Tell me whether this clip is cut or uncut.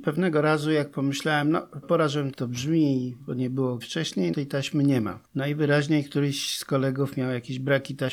cut